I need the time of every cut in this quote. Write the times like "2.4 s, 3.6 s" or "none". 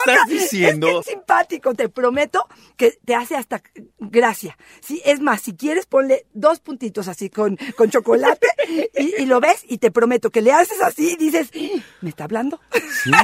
1.0 s

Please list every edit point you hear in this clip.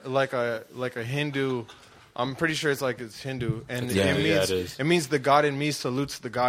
none

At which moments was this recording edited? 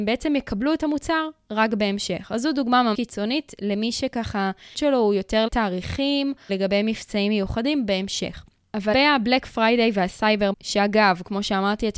2.9 s, 4.7 s, 5.5 s, 6.5 s, 8.9 s, 10.5 s

